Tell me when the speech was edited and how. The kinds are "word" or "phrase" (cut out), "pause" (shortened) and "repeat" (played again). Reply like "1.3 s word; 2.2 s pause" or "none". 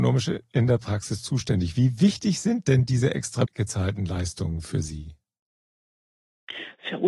3.5 s word